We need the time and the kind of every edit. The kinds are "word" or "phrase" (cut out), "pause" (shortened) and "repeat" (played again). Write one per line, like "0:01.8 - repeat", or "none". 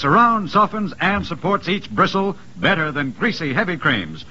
none